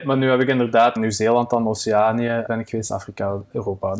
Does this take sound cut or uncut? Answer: cut